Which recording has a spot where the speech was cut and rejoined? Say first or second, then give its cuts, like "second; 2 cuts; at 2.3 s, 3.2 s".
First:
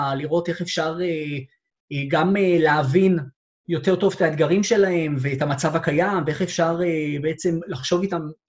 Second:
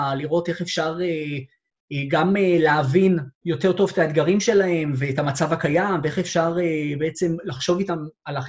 second; 1 cut; at 3.3 s